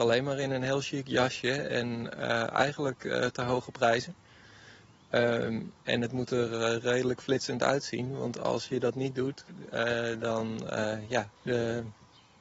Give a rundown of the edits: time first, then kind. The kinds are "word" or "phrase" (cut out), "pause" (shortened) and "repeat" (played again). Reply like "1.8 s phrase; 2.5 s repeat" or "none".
11.4 s pause